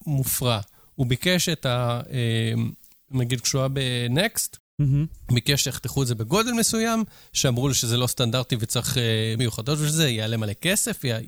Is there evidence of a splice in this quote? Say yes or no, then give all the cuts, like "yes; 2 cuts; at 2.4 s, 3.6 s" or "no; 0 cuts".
yes; 1 cut; at 9.4 s